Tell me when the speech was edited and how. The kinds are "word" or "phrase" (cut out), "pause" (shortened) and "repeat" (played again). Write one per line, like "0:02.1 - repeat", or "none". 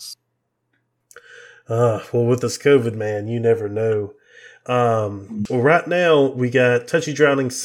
none